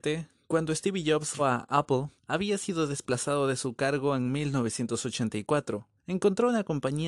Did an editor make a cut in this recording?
yes; 3 cuts; at 1.4 s, 2.2 s, 6.0 s

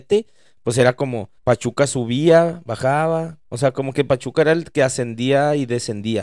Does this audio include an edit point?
yes; 1 cut; at 1.4 s

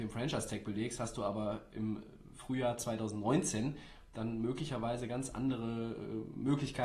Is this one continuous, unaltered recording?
yes; 0 cuts

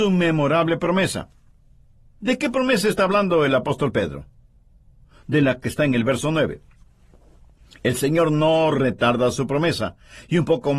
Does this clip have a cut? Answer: no; 0 cuts

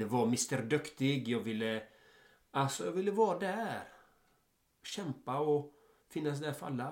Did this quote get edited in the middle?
no; 0 cuts

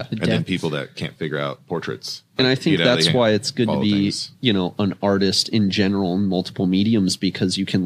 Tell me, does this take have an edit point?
no; 0 cuts

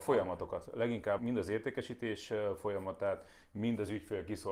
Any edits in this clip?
yes; 1 cut; at 1.2 s

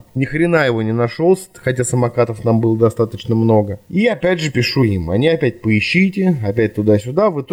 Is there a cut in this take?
no; 0 cuts

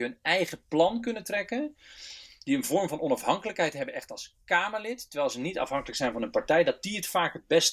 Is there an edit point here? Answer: no; 0 cuts

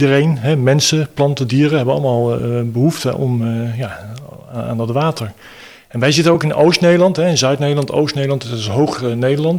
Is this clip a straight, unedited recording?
yes; 0 cuts

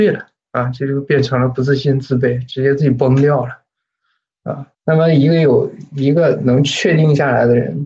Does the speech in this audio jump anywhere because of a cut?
yes; 1 cut; at 4.7 s

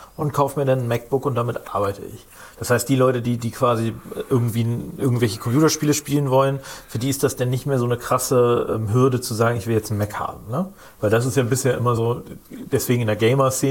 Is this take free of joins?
yes; 0 cuts

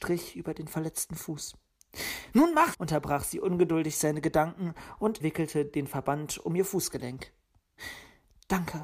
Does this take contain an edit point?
yes; 2 cuts; at 2.7 s, 5.2 s

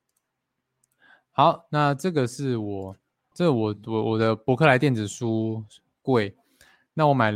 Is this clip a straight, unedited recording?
no; 1 cut; at 3.3 s

